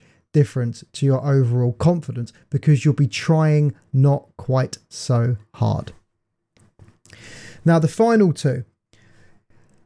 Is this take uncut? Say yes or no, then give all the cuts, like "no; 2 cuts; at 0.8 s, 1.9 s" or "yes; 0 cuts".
yes; 0 cuts